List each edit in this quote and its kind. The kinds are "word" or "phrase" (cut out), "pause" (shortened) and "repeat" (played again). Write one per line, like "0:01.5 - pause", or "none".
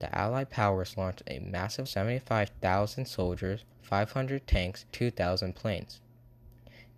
0:01.9 - phrase
0:03.7 - pause
0:04.9 - word